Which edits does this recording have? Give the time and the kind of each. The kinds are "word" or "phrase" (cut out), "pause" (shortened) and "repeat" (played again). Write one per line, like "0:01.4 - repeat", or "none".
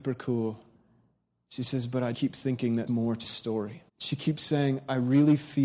0:02.1 - word
0:02.9 - word
0:03.2 - word
0:03.9 - pause